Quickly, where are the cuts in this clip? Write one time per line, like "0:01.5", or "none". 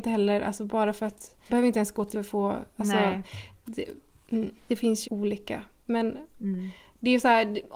0:01.5
0:02.1
0:04.6
0:05.0